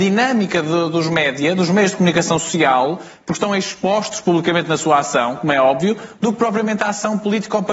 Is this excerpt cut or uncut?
uncut